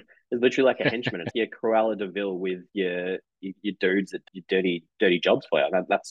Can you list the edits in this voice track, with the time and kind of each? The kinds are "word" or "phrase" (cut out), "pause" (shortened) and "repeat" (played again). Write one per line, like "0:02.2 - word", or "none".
0:01.3 - word
0:04.3 - word